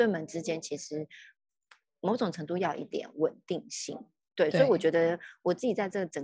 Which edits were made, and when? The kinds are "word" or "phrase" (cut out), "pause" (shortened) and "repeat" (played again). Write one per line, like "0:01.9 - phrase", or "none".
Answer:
none